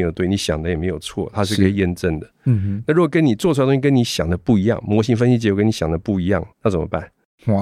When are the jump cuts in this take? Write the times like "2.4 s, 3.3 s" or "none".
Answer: 6.5 s